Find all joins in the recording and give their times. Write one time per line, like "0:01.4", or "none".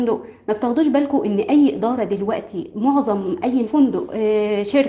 0:03.6